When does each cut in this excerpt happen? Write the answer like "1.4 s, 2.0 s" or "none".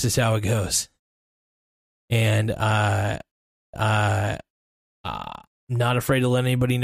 3.7 s